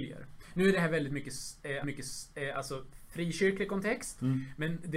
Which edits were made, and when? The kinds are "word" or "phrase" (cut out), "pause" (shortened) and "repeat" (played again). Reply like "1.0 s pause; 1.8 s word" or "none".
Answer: 1.8 s repeat